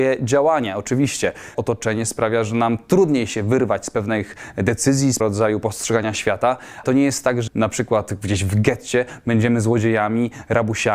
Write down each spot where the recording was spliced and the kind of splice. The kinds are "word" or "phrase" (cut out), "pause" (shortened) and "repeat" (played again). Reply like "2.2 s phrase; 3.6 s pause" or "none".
1.5 s word; 5.2 s word; 6.8 s word; 7.5 s word